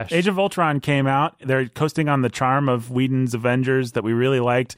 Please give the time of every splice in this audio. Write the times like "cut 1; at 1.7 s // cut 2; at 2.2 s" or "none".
none